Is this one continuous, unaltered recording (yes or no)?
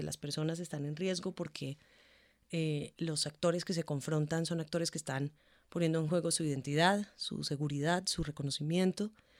yes